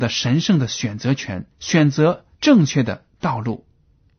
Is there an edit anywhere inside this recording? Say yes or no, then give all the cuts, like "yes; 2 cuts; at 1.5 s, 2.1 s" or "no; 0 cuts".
yes; 2 cuts; at 1.5 s, 2.3 s